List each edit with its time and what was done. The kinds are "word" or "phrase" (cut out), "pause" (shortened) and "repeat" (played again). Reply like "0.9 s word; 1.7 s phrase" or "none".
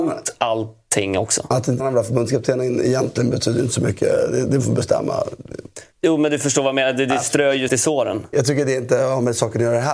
1.8 s word; 4.6 s phrase; 5.9 s pause; 7.7 s word